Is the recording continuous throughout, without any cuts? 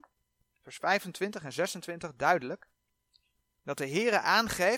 yes; 0 cuts

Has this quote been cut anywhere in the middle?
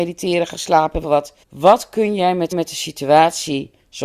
yes; 3 cuts; at 1.0 s, 1.4 s, 2.5 s

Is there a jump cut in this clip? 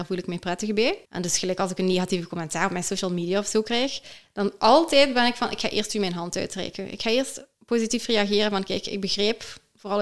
yes; 2 cuts; at 1.0 s, 7.5 s

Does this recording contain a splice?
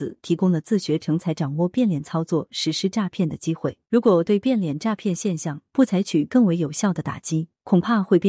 yes; 1 cut; at 3.9 s

